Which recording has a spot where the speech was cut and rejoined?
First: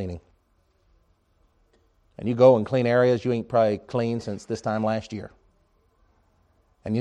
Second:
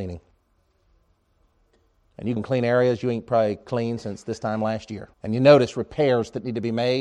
second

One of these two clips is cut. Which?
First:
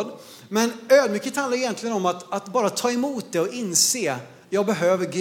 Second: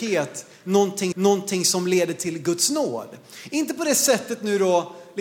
second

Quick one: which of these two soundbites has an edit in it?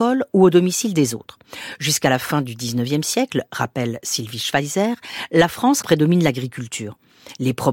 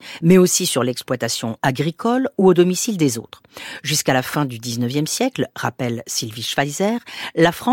first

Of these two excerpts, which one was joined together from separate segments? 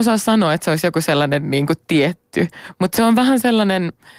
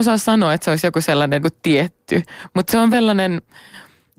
second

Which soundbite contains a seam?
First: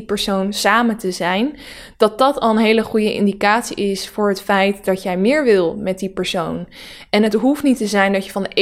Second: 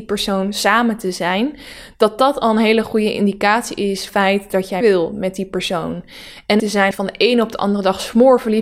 second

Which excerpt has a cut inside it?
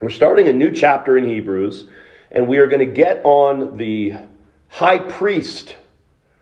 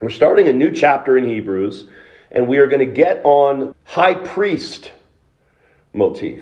second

